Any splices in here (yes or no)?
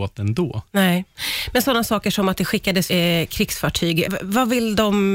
yes